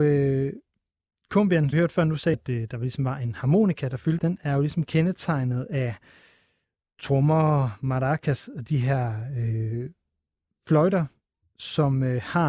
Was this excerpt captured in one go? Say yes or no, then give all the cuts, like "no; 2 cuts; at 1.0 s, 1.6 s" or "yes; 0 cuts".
no; 3 cuts; at 1.7 s, 2.3 s, 4.2 s